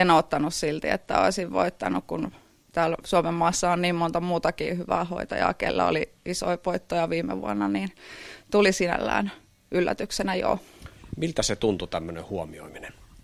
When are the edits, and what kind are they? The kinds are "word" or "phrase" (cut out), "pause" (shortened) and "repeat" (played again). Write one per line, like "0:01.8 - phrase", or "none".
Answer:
none